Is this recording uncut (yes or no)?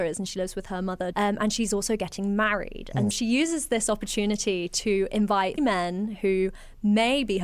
no